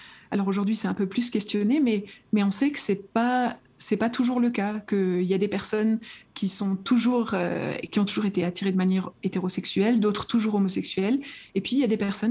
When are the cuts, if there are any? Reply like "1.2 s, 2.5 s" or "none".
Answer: none